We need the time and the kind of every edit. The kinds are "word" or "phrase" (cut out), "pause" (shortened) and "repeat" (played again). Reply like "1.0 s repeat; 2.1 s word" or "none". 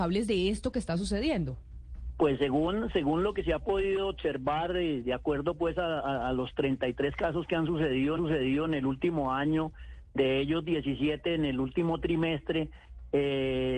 8.2 s repeat